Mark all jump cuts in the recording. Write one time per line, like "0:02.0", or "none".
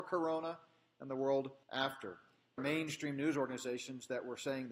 0:01.6
0:02.6